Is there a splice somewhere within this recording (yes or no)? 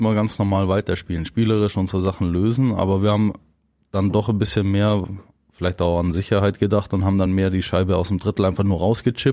no